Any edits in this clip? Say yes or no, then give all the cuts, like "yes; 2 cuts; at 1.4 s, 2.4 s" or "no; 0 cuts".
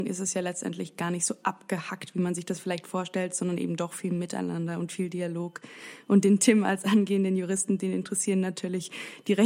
no; 0 cuts